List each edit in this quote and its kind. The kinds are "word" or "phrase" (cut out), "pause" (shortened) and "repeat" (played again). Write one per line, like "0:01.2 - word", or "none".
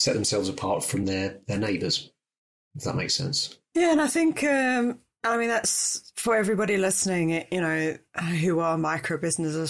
none

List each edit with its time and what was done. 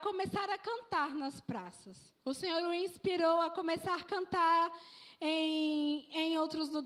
0:02.2 - pause

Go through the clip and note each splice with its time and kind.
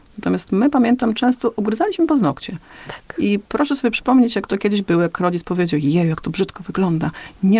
none

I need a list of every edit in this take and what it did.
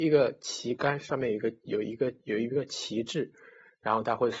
none

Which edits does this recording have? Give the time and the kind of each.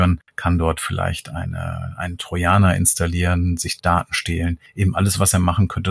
0:03.8 - phrase

